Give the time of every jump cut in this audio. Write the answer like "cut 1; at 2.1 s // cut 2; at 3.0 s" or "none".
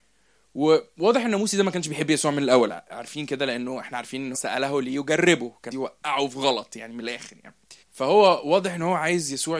cut 1; at 4.3 s // cut 2; at 5.7 s // cut 3; at 7.8 s